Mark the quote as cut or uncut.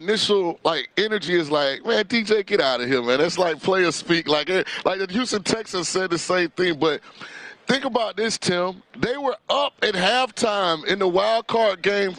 uncut